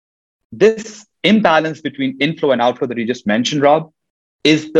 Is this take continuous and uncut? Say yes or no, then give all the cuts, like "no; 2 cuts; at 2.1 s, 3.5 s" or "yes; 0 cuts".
no; 1 cut; at 1.1 s